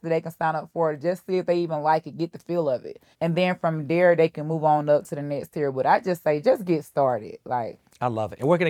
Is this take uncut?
no; 1 cut; at 3.1 s

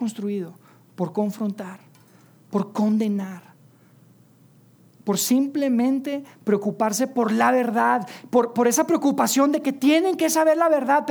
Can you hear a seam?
no; 0 cuts

